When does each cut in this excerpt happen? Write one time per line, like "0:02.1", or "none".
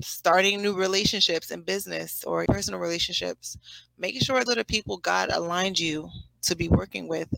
0:02.5
0:04.5